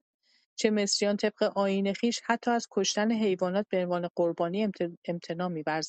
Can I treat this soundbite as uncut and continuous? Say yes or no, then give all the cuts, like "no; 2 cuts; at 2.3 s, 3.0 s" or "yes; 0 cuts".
yes; 0 cuts